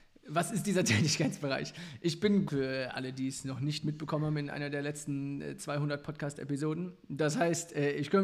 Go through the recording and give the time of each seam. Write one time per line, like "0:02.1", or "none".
0:02.5